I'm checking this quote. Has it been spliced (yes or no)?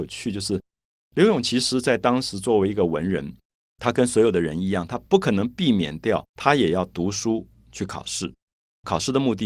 yes